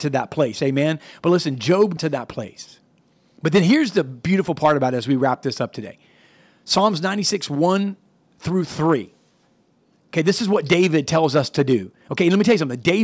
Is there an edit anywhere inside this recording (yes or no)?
yes